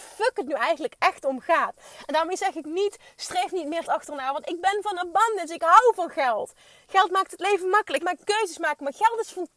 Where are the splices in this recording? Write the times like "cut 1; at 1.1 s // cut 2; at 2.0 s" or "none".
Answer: cut 1; at 3.8 s // cut 2; at 8.0 s